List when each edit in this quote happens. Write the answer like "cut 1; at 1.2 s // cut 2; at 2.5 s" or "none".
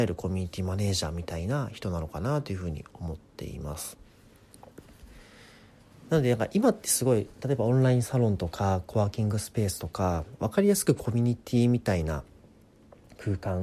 none